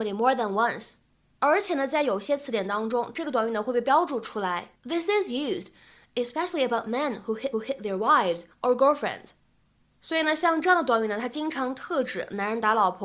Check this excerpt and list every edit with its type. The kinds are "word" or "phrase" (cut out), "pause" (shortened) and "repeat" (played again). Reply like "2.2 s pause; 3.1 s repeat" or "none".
4.8 s pause; 7.5 s repeat; 8.5 s pause